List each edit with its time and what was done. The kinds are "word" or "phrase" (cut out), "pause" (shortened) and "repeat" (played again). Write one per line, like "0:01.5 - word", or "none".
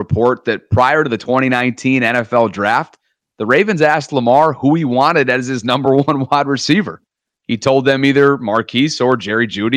none